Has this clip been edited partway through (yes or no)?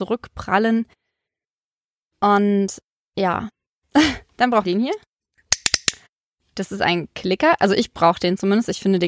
yes